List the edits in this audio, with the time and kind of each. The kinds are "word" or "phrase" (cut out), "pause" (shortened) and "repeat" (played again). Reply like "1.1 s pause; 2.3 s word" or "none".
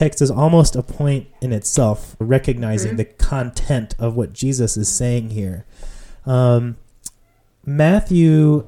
2.2 s word